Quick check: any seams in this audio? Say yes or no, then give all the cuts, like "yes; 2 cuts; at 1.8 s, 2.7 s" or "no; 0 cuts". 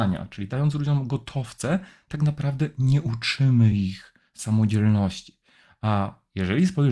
no; 0 cuts